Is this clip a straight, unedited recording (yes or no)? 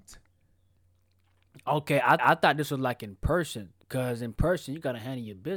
no